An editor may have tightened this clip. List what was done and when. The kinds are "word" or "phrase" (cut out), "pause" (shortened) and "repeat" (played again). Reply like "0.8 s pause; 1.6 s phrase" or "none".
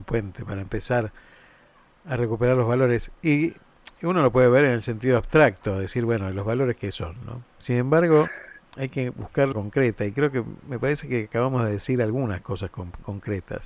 7.5 s pause; 9.5 s phrase